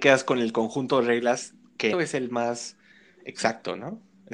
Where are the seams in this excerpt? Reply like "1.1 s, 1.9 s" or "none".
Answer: 1.9 s, 2.9 s